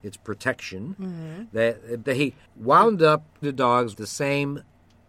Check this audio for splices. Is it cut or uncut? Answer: cut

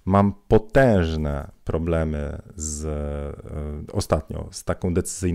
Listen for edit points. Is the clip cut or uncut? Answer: uncut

